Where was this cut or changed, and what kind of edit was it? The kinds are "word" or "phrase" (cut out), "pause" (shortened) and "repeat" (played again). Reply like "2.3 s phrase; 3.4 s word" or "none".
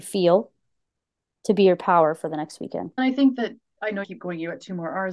3.0 s word; 4.0 s phrase